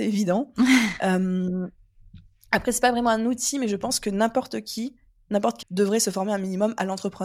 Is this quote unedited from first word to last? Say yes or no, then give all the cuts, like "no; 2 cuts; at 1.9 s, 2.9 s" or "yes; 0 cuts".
no; 1 cut; at 5.6 s